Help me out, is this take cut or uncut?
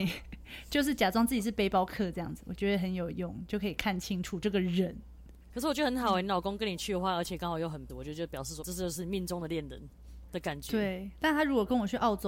cut